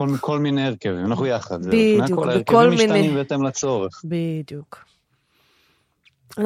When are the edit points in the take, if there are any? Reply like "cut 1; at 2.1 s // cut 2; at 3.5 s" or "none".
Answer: none